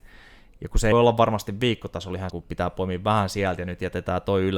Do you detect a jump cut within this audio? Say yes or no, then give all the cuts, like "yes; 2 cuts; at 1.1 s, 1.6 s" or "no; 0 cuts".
yes; 2 cuts; at 0.9 s, 2.3 s